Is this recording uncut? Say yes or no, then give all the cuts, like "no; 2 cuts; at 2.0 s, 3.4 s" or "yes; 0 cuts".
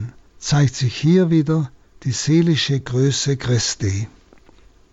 yes; 0 cuts